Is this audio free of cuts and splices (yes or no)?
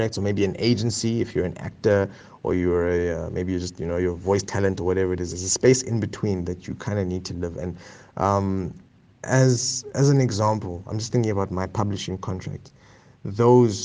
yes